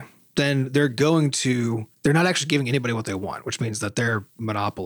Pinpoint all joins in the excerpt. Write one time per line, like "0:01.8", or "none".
none